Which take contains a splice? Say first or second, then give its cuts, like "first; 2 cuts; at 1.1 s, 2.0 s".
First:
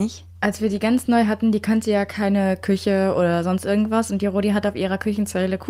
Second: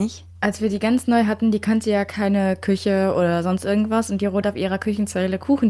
second; 1 cut; at 4.4 s